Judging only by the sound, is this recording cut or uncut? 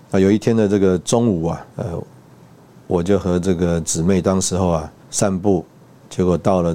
cut